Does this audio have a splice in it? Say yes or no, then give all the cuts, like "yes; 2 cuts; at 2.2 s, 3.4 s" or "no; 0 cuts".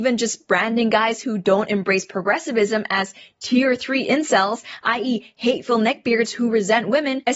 no; 0 cuts